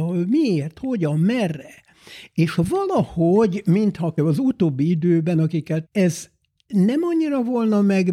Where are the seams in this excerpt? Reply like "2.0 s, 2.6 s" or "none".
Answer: 4.2 s, 5.8 s